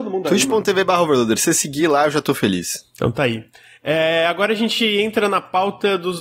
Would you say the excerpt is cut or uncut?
uncut